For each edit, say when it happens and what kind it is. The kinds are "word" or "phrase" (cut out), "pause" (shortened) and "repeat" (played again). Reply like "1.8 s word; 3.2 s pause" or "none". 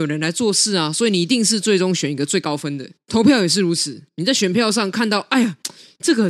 3.0 s pause